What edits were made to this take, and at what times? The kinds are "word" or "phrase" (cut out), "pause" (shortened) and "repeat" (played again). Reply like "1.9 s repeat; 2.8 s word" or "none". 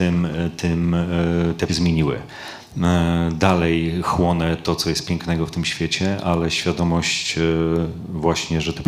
1.7 s phrase